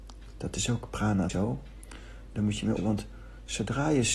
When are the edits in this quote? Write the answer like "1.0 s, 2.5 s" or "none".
1.3 s, 2.3 s, 2.8 s